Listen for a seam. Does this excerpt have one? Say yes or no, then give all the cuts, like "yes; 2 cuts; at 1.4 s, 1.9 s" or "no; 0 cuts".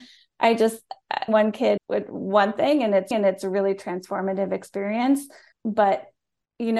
yes; 4 cuts; at 1.3 s, 1.8 s, 3.1 s, 5.5 s